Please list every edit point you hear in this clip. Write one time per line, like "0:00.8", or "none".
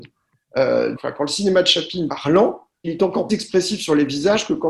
0:01.0
0:02.1
0:02.8
0:03.3

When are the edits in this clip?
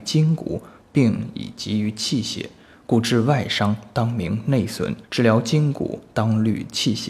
0:05.0

